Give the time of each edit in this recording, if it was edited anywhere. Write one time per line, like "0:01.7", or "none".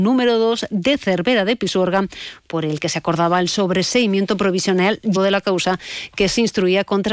0:05.2